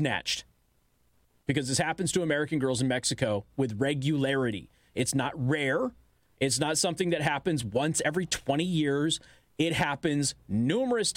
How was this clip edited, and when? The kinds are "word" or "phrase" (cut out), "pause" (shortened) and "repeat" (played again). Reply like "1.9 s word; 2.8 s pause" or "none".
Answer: none